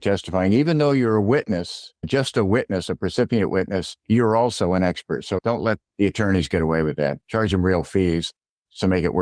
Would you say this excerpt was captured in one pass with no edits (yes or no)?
no